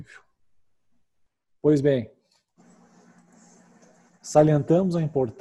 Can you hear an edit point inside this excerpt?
no; 0 cuts

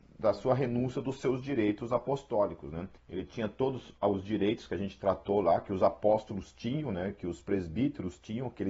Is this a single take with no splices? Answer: no; 1 cut; at 3.0 s

